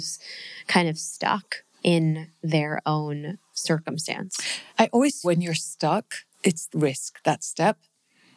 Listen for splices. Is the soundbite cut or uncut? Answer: cut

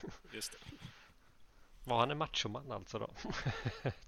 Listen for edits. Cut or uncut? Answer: uncut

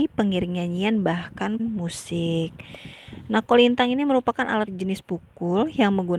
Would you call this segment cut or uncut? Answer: cut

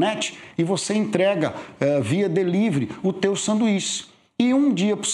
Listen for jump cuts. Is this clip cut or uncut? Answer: uncut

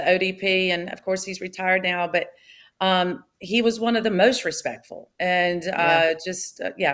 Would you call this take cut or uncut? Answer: cut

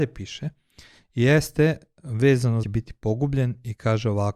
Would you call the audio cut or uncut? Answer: cut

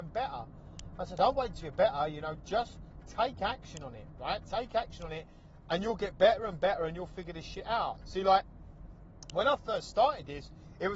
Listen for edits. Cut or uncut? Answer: uncut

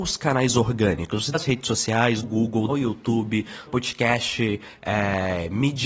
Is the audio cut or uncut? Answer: cut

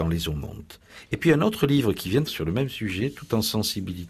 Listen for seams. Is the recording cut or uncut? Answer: cut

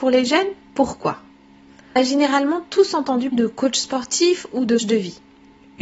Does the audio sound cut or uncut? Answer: cut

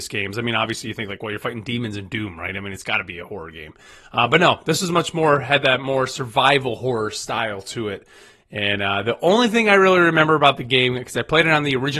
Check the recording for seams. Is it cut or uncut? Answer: uncut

